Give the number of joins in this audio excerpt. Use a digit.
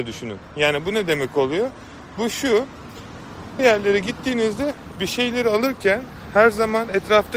1